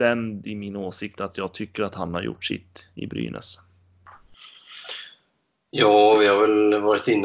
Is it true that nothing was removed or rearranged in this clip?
yes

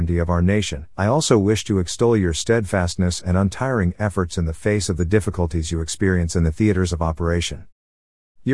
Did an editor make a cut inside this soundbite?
yes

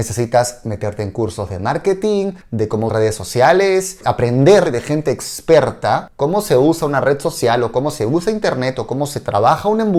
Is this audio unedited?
no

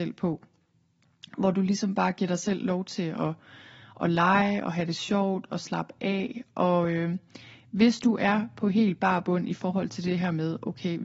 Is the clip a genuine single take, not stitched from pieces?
yes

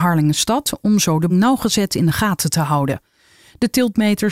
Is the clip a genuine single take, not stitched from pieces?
no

